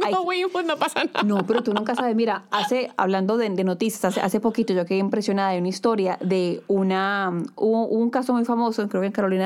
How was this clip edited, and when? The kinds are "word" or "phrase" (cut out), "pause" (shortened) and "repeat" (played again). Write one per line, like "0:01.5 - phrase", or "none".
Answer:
none